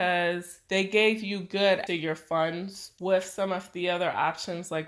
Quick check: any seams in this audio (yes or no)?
yes